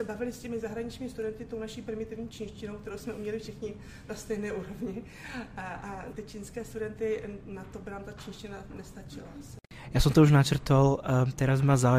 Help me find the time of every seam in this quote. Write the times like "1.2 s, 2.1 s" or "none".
6.1 s